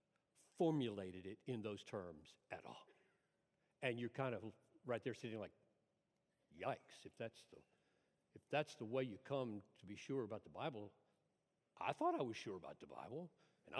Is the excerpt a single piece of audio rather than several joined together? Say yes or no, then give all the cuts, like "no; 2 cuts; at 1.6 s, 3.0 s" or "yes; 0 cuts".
yes; 0 cuts